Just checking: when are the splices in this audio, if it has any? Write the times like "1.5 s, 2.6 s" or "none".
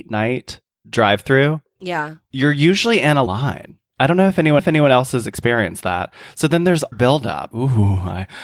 3.3 s, 4.6 s, 6.9 s, 7.5 s